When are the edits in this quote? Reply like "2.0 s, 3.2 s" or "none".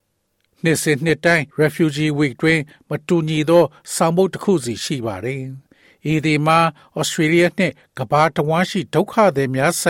1.5 s